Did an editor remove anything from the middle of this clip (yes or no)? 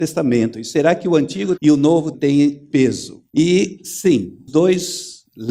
yes